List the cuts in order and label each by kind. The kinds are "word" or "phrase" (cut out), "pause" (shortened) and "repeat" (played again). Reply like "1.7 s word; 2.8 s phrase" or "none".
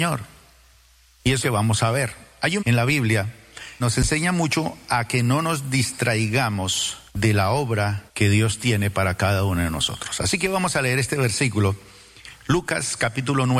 1.4 s phrase; 2.6 s word; 3.8 s word; 7.1 s pause; 8.1 s pause